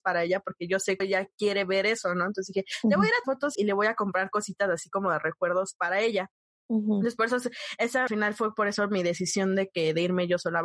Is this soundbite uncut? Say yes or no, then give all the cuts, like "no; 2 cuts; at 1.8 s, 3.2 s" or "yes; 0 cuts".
no; 4 cuts; at 1.0 s, 3.2 s, 3.5 s, 8.1 s